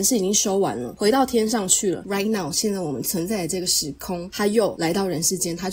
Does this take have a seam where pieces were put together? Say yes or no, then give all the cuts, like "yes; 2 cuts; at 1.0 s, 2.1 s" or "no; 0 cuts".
no; 0 cuts